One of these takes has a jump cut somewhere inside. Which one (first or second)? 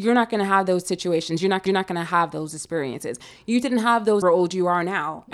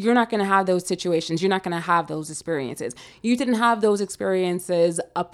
first